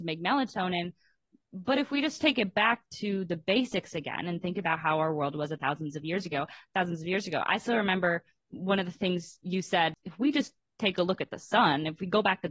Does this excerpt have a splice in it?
no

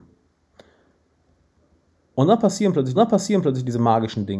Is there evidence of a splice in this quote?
yes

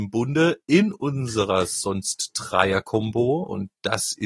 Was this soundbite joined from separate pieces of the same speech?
no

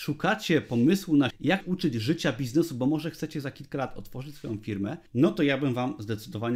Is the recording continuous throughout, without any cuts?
no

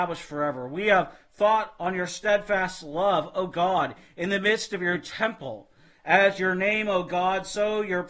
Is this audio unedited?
yes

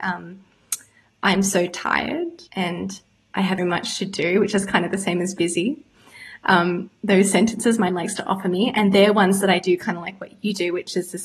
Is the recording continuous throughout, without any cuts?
no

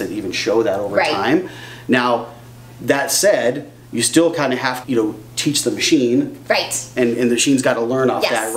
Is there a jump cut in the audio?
yes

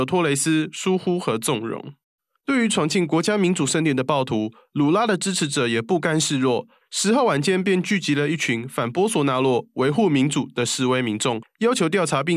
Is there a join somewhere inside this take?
no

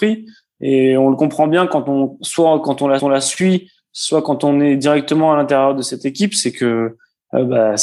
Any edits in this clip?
yes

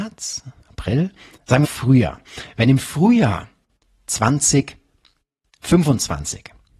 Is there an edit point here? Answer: yes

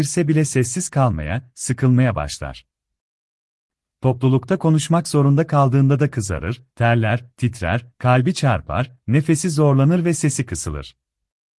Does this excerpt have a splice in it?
no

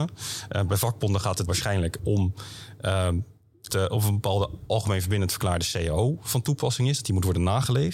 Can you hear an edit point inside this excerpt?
yes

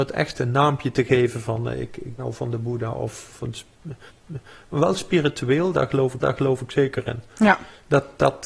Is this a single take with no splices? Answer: no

